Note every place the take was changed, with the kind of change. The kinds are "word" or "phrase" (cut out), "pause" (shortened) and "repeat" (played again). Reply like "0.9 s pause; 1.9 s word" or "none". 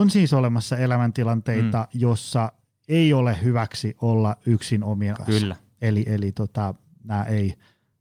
5.2 s word